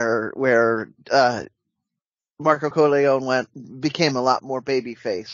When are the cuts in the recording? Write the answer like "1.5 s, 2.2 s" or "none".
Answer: none